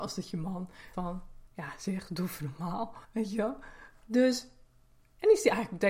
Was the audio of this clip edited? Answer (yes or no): yes